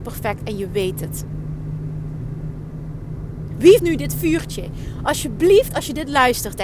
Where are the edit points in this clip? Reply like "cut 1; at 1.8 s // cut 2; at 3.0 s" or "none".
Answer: cut 1; at 3.8 s

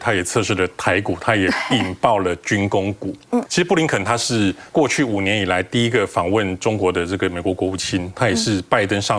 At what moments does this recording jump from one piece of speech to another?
cut 1; at 3.5 s // cut 2; at 4.7 s

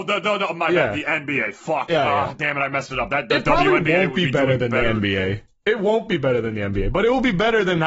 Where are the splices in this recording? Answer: none

